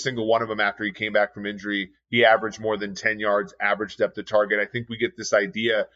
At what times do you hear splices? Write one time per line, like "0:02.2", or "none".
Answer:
none